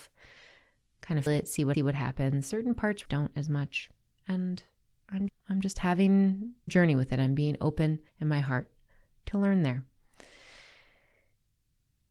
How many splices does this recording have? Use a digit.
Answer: 8